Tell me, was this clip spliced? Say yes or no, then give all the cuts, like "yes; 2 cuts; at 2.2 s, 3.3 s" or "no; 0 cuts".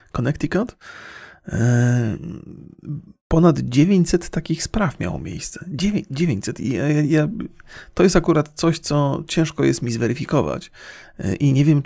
no; 0 cuts